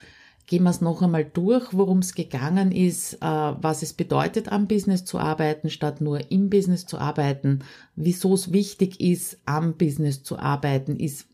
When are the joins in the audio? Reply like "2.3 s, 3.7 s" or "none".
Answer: 7.8 s